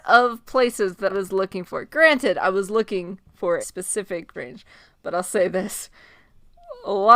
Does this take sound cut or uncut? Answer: cut